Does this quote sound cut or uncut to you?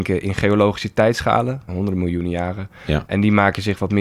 cut